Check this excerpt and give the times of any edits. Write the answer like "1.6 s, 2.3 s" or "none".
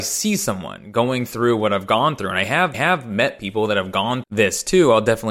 2.7 s, 4.2 s